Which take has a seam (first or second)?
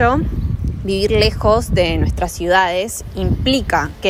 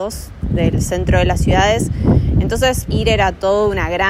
second